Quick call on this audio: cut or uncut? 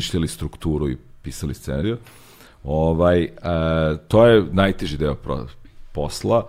uncut